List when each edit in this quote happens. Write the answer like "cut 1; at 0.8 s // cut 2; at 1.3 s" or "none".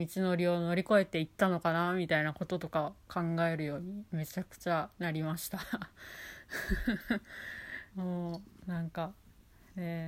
cut 1; at 7.9 s